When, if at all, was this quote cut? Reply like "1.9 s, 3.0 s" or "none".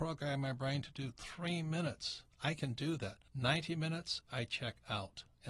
2.3 s, 3.3 s

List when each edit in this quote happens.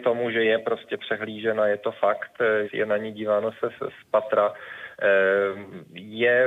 2.7 s

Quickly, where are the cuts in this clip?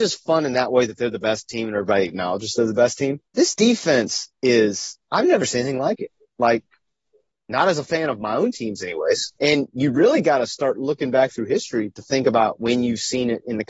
3.3 s, 6.2 s, 9.4 s

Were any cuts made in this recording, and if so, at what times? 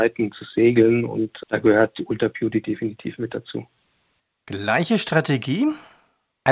none

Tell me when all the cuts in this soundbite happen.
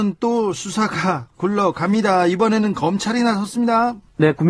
1.3 s

